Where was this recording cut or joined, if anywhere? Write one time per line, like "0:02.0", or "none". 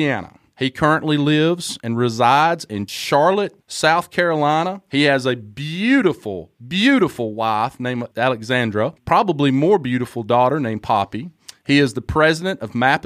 0:09.0

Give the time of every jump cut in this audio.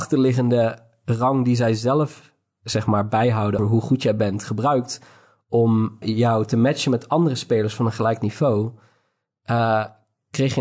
0:03.6
0:06.0

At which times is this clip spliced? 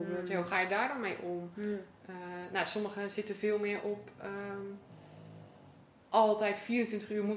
none

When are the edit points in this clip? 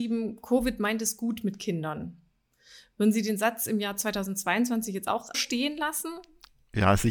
0:05.3

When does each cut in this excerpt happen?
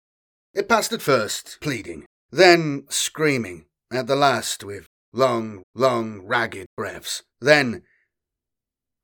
0:01.6
0:02.2
0:03.8
0:05.6
0:07.3

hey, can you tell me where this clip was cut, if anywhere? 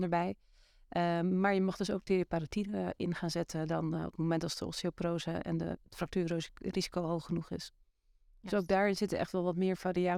none

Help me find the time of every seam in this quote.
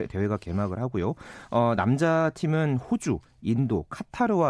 none

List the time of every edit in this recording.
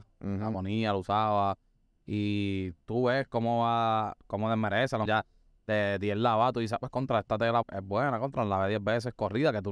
0:05.1
0:07.6

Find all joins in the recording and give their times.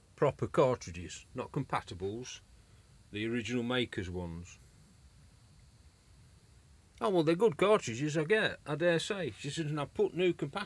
none

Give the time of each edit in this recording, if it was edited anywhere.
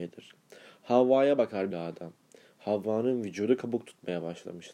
0:01.7

